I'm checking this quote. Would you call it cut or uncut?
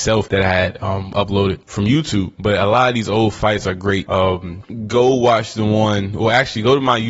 uncut